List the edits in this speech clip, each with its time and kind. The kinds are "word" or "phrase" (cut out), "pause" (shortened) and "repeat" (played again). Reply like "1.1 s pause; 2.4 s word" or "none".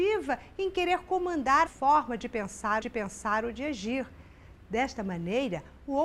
1.7 s phrase; 2.8 s repeat